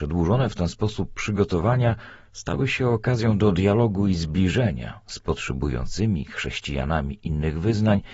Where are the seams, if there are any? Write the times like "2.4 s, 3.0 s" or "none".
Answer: none